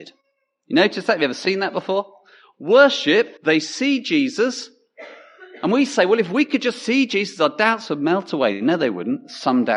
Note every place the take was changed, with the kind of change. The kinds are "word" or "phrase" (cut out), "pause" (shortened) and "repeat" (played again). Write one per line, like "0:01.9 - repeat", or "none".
0:03.4 - pause